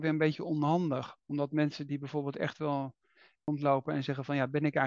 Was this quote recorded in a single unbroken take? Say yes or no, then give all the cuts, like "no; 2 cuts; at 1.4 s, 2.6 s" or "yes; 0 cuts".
yes; 0 cuts